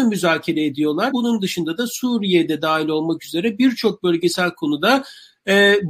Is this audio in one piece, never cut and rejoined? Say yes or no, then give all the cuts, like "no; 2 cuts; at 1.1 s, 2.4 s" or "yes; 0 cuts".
no; 1 cut; at 1.1 s